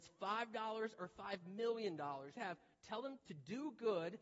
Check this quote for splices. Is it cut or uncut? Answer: cut